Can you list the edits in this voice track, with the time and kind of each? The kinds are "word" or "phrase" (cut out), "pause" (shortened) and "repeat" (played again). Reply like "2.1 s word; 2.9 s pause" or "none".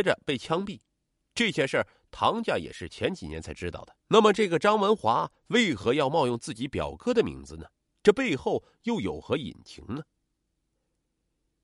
4.0 s pause; 7.9 s pause